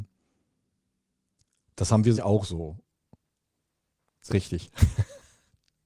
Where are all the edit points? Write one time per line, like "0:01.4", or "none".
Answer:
0:02.2
0:04.3